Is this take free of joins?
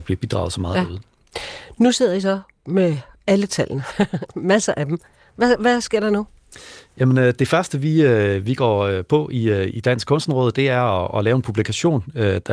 yes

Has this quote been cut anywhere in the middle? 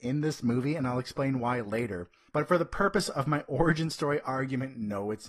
no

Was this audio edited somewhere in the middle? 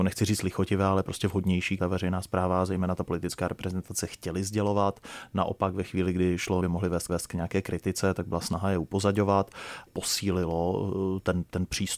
yes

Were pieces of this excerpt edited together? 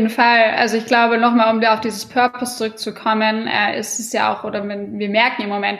no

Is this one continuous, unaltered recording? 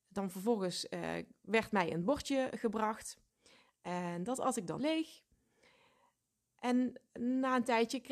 no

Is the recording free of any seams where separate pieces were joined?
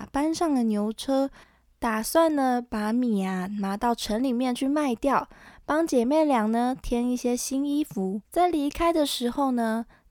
no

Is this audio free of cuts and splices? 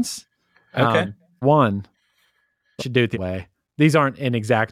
no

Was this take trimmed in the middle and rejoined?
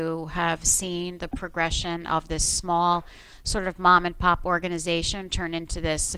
no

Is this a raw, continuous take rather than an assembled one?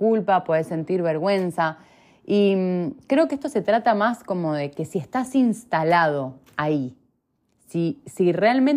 yes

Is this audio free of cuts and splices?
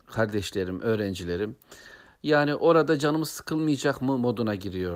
yes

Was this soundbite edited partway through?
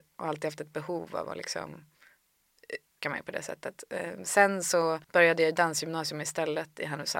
yes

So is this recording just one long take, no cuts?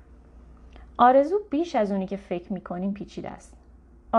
yes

